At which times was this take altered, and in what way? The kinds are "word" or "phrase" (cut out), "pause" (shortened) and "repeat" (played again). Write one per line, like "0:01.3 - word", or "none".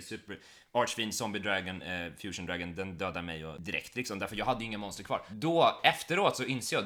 none

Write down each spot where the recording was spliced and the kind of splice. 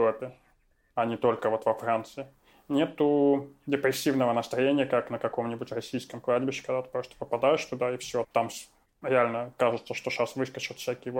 0:08.2 - word

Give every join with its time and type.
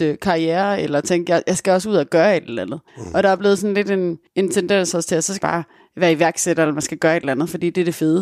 0:02.9 - pause
0:04.3 - pause
0:05.4 - word

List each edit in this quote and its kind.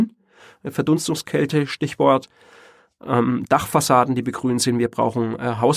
0:03.4 - phrase

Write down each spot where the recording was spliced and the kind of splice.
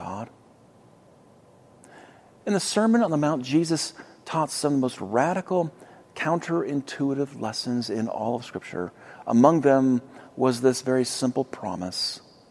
none

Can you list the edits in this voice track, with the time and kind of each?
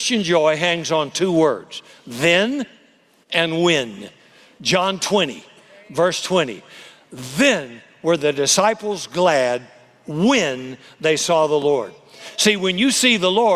none

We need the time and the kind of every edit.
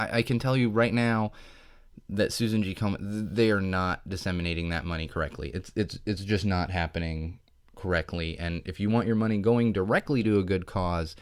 none

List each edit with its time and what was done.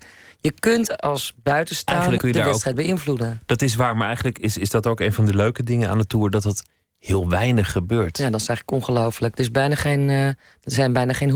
0:02.2 - word

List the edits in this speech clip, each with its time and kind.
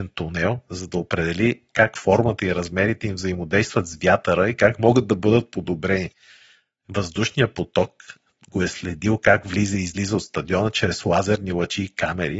none

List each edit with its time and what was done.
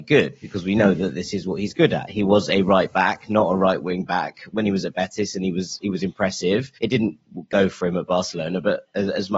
0:04.5 - word
0:06.8 - pause

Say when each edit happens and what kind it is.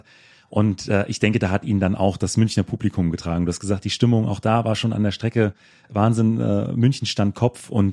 none

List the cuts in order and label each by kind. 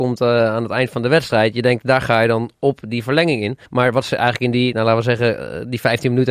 0:03.7 - pause

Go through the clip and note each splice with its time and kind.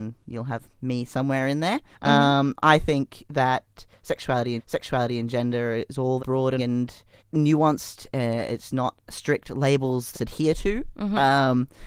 0:01.9 - pause
0:04.6 - repeat
0:06.2 - word
0:06.6 - word
0:07.2 - pause
0:10.1 - phrase

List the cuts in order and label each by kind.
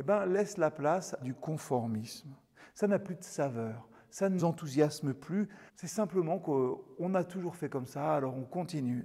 0:01.2 - word
0:04.4 - word
0:05.7 - pause

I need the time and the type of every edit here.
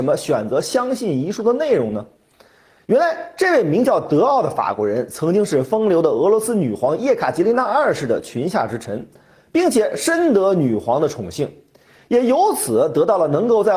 none

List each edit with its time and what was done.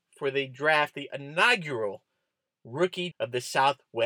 0:03.1 - word

